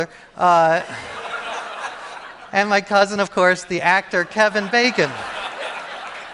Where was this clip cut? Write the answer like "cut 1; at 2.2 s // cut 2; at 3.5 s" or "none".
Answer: none